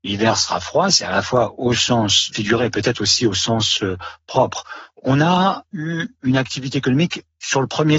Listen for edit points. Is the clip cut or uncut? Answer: uncut